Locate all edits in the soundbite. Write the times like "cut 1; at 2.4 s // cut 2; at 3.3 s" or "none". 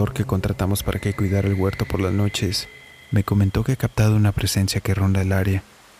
none